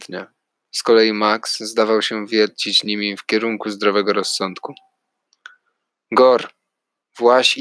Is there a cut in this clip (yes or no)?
no